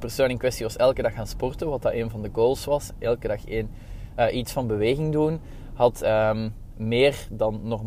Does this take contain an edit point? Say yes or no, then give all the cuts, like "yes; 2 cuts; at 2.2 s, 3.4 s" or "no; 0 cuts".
no; 0 cuts